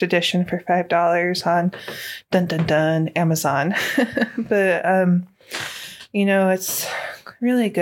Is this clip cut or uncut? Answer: uncut